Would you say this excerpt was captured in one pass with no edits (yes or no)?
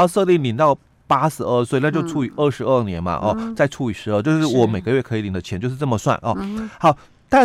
yes